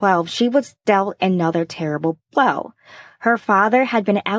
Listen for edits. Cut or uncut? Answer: uncut